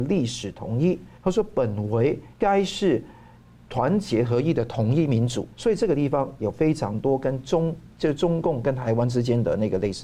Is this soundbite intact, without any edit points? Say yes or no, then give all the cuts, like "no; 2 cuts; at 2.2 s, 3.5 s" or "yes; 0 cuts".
no; 3 cuts; at 1.2 s, 2.3 s, 5.5 s